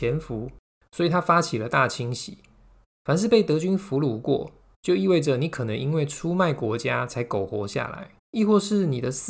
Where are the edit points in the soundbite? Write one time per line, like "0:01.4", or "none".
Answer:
0:08.2